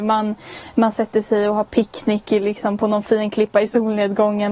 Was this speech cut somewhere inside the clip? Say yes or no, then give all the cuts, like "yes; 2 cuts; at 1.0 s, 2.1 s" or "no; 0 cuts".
no; 0 cuts